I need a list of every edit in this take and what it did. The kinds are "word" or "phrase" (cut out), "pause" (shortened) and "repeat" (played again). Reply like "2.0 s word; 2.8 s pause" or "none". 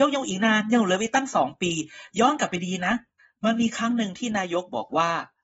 3.2 s pause